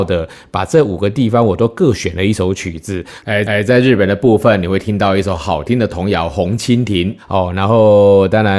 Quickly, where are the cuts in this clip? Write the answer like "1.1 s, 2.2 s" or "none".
3.5 s